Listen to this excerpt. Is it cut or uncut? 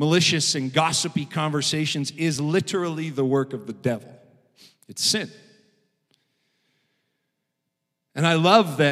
uncut